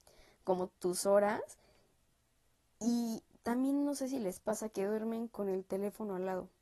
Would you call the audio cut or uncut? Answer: uncut